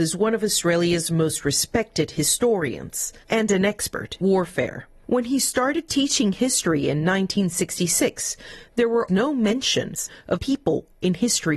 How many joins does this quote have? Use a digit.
3